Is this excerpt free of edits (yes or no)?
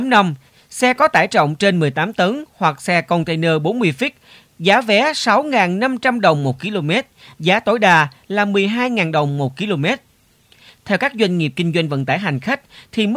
yes